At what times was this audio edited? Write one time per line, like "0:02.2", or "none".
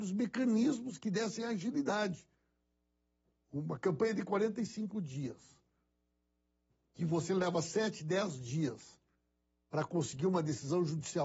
none